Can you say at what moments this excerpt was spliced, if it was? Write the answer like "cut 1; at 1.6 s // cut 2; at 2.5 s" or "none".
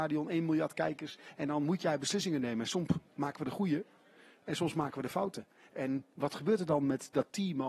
none